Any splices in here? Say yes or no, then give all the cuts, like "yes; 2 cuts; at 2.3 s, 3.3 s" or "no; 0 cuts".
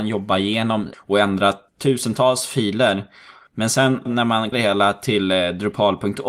yes; 3 cuts; at 0.9 s, 4.1 s, 4.5 s